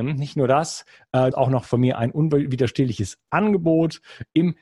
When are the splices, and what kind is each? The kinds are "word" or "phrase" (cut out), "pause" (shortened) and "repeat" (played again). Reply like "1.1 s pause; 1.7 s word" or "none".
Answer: 1.3 s phrase